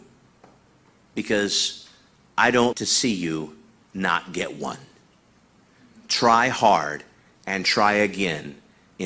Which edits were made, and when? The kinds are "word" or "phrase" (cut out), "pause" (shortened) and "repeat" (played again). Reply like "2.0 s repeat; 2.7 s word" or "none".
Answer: 2.7 s word